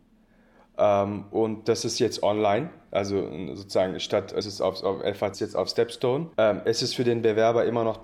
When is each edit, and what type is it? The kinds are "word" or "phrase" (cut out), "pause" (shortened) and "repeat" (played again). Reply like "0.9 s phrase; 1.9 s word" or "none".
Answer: 4.4 s phrase; 5.3 s phrase; 6.3 s pause

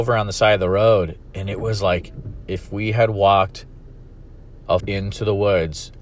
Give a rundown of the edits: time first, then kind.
4.8 s word

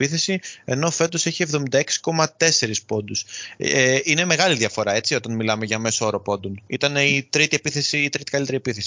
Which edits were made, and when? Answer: 6.7 s pause

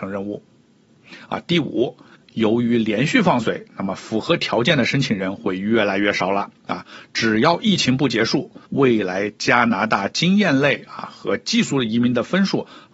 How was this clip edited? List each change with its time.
2.2 s pause; 8.7 s pause

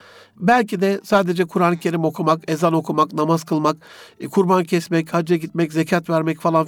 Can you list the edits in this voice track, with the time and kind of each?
none

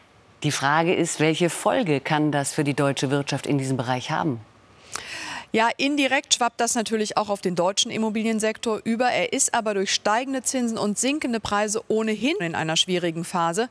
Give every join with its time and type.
12.4 s word

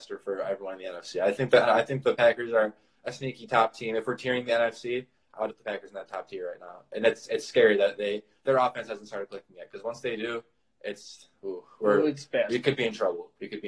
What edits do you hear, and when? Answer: 5.5 s word

